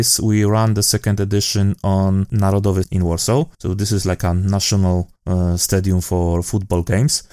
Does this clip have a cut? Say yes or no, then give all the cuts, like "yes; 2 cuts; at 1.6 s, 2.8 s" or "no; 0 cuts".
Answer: yes; 3 cuts; at 2.8 s, 3.5 s, 5.2 s